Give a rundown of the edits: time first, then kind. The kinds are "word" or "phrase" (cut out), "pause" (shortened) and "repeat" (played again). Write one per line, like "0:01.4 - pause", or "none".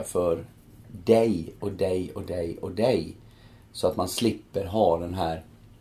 none